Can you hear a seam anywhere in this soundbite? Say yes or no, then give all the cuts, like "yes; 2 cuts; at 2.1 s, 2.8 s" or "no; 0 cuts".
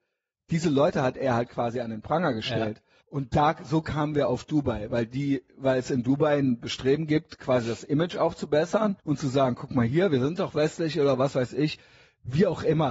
yes; 2 cuts; at 3.0 s, 9.0 s